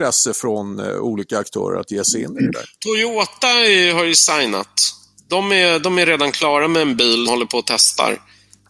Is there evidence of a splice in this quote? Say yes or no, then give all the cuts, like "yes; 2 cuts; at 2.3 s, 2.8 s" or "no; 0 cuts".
yes; 2 cuts; at 2.7 s, 7.3 s